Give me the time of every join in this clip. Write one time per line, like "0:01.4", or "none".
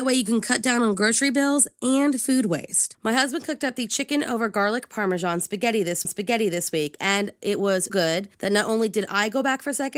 0:06.0
0:07.9
0:08.3